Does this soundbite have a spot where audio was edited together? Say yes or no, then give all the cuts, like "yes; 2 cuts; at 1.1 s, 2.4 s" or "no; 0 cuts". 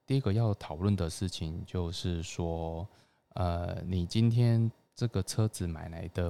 no; 0 cuts